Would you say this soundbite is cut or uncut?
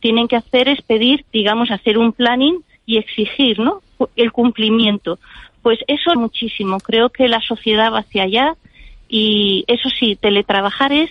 cut